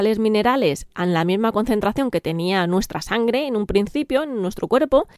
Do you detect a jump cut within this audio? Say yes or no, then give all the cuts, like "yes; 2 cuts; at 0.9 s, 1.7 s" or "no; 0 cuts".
no; 0 cuts